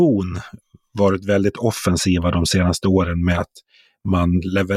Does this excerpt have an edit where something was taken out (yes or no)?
no